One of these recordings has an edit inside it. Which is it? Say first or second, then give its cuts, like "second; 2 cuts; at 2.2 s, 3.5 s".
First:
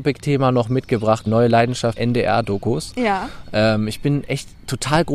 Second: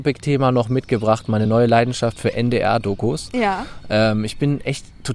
first; 2 cuts; at 1.3 s, 2.0 s